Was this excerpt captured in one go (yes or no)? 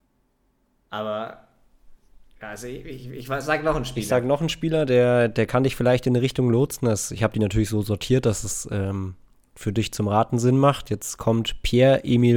yes